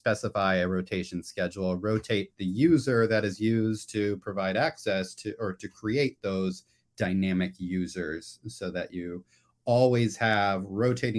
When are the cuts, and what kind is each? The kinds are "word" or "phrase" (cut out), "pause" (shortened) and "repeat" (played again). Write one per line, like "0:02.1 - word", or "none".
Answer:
none